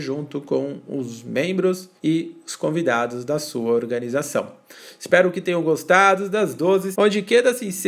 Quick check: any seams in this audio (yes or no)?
yes